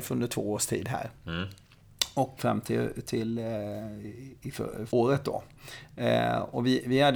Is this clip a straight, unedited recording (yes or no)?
no